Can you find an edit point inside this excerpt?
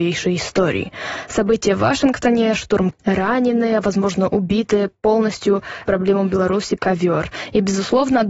yes; 3 cuts; at 2.9 s, 5.8 s, 6.8 s

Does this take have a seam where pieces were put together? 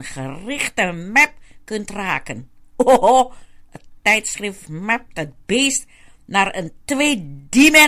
no; 0 cuts

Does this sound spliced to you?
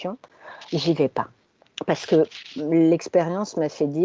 no; 0 cuts

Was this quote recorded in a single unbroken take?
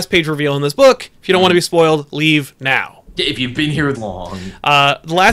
no; 1 cut; at 3.9 s

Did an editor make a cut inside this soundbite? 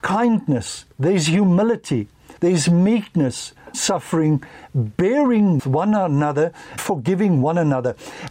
yes; 5 cuts; at 0.9 s, 2.4 s, 3.7 s, 5.6 s, 6.8 s

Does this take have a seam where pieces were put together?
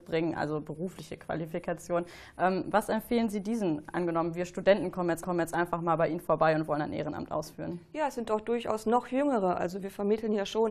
yes; 1 cut; at 5.2 s

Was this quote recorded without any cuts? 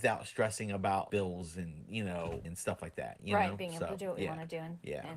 no; 2 cuts; at 1.1 s, 2.4 s

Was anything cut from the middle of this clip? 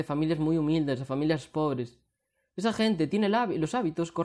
no; 0 cuts

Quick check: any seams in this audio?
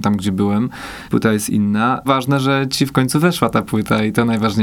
yes; 1 cut; at 1.1 s

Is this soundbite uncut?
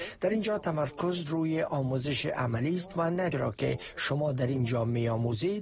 no; 1 cut; at 3.3 s

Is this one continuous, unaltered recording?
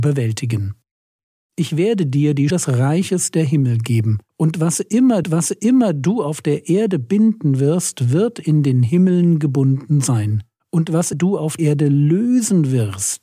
no; 6 cuts; at 2.5 s, 4.3 s, 5.2 s, 10.6 s, 11.1 s, 11.6 s

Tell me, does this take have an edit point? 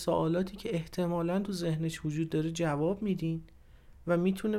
no; 0 cuts

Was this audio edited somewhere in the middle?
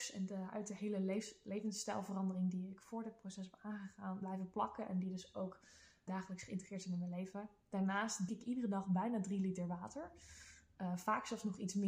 yes; 3 cuts; at 4.2 s, 6.1 s, 8.3 s

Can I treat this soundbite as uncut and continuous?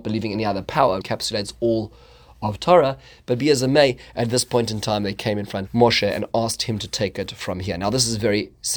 no; 2 cuts; at 1.0 s, 5.7 s

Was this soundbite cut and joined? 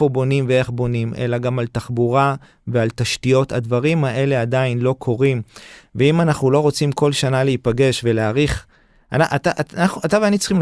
no; 0 cuts

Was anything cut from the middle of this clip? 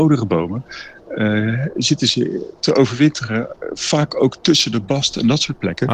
no; 0 cuts

